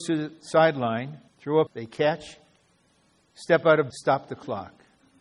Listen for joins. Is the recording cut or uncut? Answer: cut